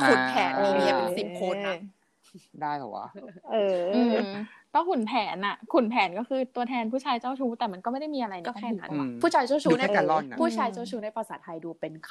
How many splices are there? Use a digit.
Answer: 1